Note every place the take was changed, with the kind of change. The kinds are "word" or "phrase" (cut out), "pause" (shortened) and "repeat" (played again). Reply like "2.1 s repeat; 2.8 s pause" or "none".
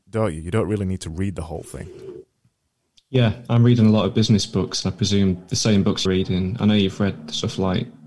6.1 s word